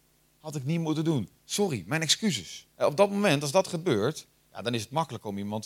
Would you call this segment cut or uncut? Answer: cut